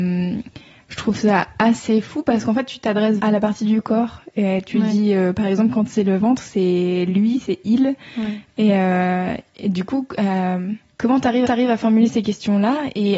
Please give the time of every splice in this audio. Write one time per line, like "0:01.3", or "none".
0:03.2
0:11.4